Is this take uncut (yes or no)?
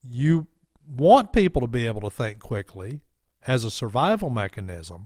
yes